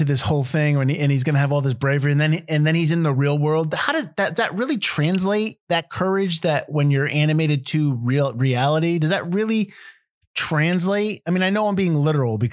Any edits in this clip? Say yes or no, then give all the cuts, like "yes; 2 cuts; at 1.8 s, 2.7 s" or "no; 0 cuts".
no; 0 cuts